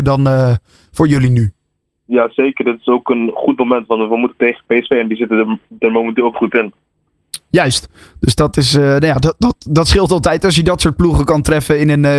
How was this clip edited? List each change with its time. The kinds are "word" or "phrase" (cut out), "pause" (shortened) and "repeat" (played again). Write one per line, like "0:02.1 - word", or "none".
0:06.3 - word

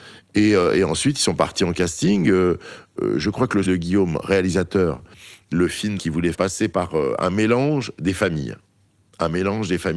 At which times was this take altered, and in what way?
0:03.6 - word
0:05.5 - word
0:06.0 - word
0:06.3 - word

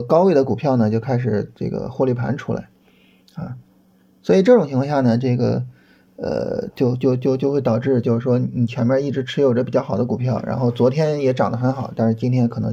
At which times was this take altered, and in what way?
none

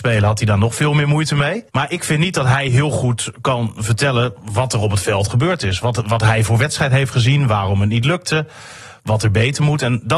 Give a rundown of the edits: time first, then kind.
0:01.7 - pause
0:04.4 - pause

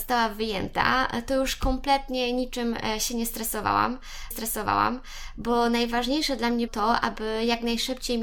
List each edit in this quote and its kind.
0:04.3 - repeat
0:06.7 - word

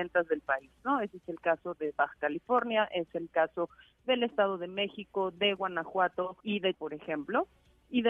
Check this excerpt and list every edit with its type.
0:06.4 - pause
0:06.7 - word

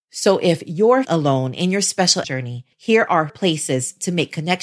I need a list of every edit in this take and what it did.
0:01.0 - word
0:02.2 - word
0:02.7 - pause
0:03.3 - word

